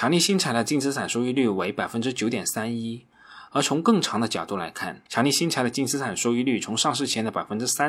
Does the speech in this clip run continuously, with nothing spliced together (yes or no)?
no